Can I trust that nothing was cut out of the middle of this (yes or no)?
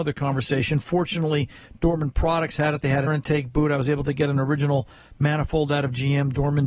no